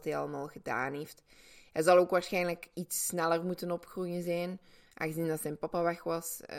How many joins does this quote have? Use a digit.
0